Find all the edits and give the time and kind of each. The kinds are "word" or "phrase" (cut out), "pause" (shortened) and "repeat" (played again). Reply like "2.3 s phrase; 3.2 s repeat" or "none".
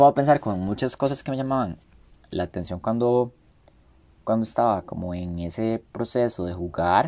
none

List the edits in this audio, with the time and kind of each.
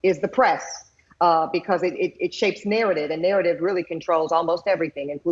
none

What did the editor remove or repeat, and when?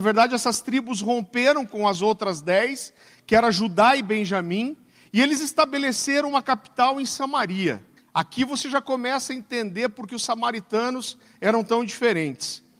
8.0 s pause

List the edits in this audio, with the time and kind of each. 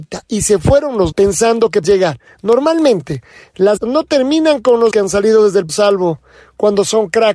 1.1 s word; 1.8 s word; 3.8 s word; 4.9 s word; 5.7 s word

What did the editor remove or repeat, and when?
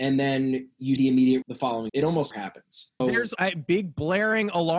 1.0 s word; 1.4 s word; 1.9 s word; 2.3 s word; 3.0 s word; 3.4 s word

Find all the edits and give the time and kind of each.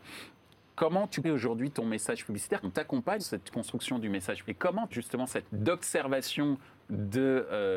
1.2 s word; 2.6 s word; 3.2 s word; 4.4 s word; 4.9 s word; 5.5 s word

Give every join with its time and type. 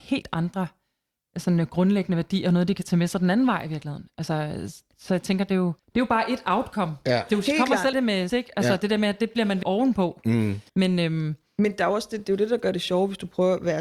5.8 s pause; 7.9 s word; 8.3 s word; 9.6 s phrase; 10.7 s pause

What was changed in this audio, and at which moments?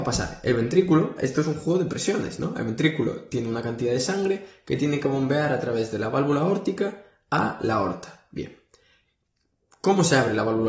none

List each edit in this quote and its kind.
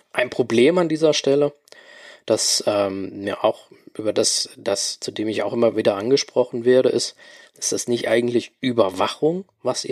none

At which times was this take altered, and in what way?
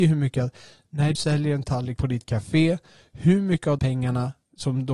1.1 s word; 2.0 s word; 3.8 s word

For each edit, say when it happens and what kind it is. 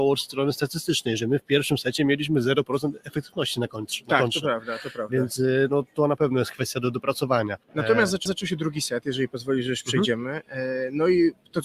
7.6 s pause; 8.3 s repeat

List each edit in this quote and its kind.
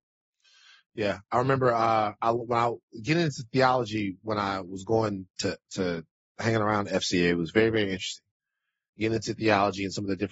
none

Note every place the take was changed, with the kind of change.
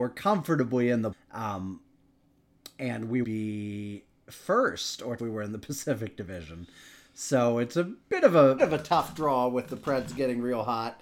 1.1 s word; 3.2 s word; 5.2 s phrase; 8.6 s word

